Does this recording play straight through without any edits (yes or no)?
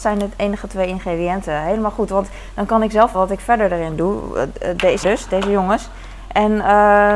no